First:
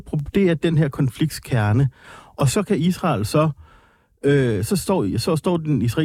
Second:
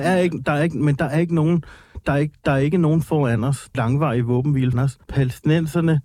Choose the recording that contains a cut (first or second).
second